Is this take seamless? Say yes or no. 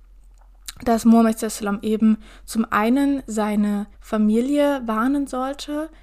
no